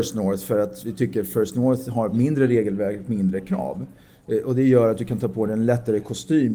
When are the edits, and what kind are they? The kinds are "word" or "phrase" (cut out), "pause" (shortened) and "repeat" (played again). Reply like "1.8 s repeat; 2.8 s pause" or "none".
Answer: none